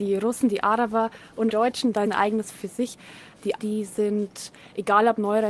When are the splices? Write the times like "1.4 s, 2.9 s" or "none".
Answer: 1.5 s, 2.1 s, 2.5 s, 3.6 s